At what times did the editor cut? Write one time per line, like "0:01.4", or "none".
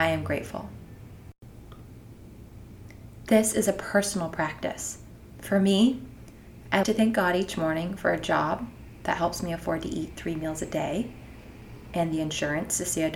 0:06.8